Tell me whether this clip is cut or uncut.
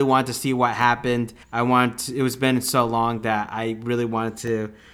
cut